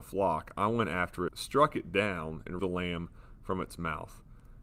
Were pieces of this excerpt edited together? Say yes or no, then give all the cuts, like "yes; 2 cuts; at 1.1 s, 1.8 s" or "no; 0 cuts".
yes; 2 cuts; at 1.3 s, 2.6 s